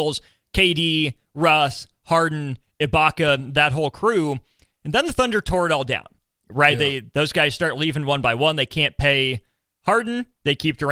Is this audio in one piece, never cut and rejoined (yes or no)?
yes